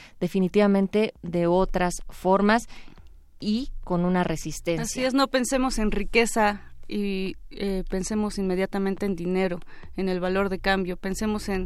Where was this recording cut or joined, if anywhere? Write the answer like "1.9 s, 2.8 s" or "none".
none